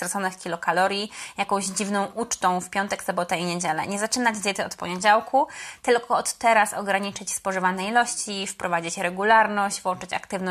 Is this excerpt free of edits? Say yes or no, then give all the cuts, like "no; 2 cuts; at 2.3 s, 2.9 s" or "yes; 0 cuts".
yes; 0 cuts